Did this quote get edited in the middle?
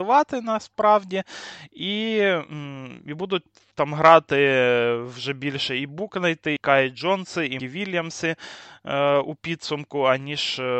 yes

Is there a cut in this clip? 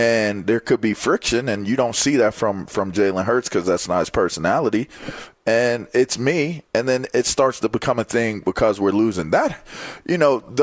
no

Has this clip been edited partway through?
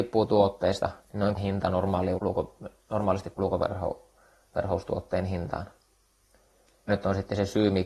yes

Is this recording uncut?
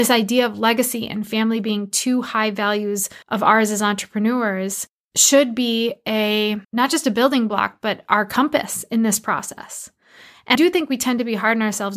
no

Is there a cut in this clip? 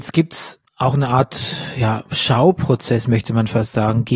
no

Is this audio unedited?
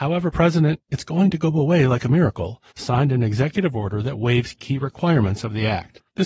no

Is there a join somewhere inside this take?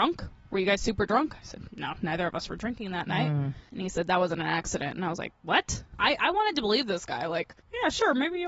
no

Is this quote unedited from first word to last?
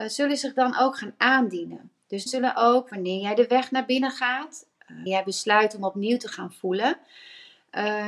no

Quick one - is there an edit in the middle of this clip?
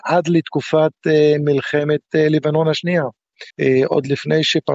yes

